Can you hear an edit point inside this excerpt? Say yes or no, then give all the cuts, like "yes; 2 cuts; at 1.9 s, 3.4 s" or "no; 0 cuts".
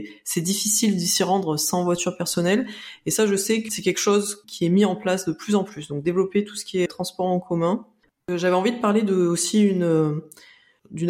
yes; 3 cuts; at 3.7 s, 4.4 s, 6.9 s